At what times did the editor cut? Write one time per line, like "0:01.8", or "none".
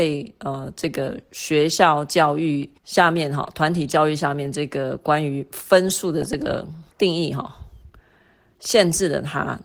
0:02.8
0:06.9